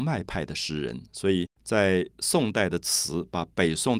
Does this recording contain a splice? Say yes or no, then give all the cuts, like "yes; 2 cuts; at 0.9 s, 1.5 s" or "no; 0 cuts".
yes; 1 cut; at 1.5 s